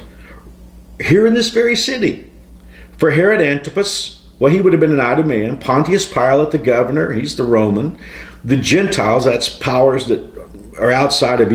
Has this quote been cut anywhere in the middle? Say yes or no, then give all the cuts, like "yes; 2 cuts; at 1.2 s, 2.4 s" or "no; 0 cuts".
no; 0 cuts